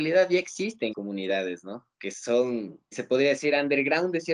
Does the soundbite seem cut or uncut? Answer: cut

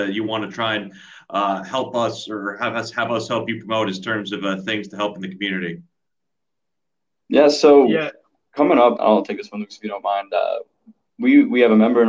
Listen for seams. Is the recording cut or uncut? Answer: cut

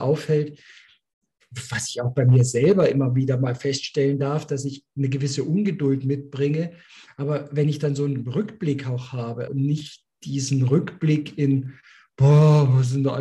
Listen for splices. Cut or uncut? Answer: cut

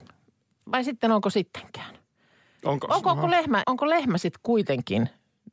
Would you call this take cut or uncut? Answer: cut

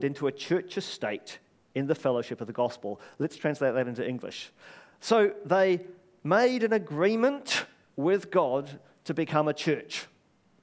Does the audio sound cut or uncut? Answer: uncut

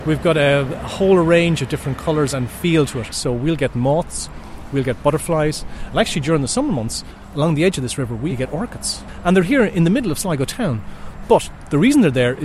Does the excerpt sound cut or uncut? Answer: cut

